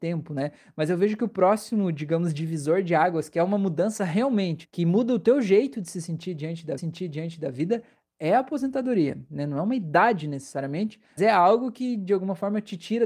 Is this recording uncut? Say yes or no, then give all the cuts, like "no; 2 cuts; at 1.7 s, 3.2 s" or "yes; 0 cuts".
no; 3 cuts; at 4.6 s, 6.8 s, 11.2 s